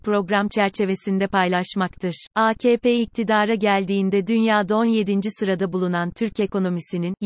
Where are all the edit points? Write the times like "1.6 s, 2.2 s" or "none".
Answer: 2.3 s

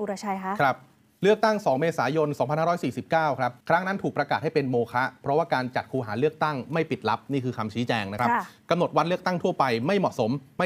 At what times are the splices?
3.6 s

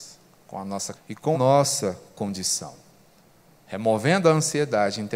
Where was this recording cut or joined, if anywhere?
0.9 s, 1.3 s

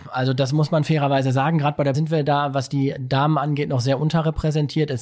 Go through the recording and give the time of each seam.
1.9 s

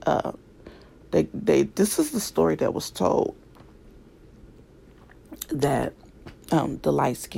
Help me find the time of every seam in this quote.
6.4 s

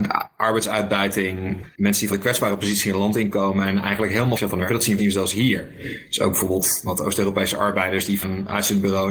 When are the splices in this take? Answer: 2.1 s, 4.3 s, 4.7 s, 5.0 s, 6.9 s, 8.2 s

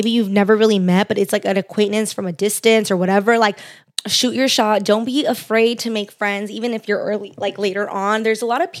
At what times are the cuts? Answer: none

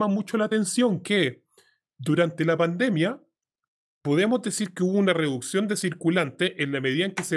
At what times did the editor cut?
none

